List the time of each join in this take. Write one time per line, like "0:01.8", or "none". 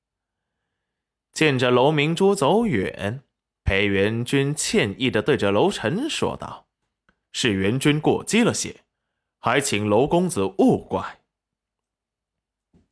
0:06.7